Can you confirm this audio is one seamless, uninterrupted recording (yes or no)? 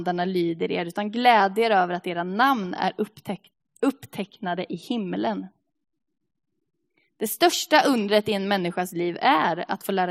yes